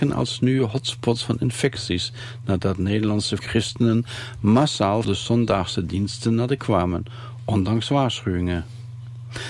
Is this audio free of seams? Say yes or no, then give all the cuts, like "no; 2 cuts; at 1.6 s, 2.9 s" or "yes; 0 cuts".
no; 3 cuts; at 3.4 s, 5.0 s, 6.6 s